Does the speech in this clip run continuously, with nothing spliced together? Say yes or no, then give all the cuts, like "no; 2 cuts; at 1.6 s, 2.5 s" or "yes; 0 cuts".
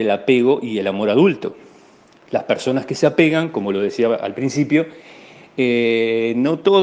yes; 0 cuts